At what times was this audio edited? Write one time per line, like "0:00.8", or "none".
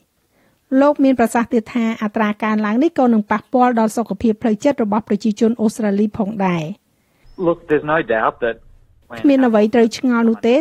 none